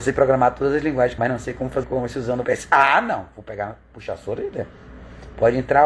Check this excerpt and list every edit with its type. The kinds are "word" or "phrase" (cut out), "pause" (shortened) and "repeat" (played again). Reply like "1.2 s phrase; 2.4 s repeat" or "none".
1.2 s phrase; 1.8 s phrase; 2.4 s phrase